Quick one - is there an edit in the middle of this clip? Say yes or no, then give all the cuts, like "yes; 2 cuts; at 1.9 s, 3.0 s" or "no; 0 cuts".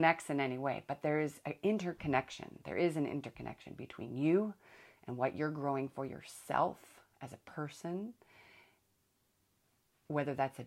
no; 0 cuts